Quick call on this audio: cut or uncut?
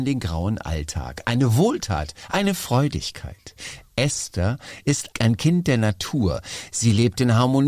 cut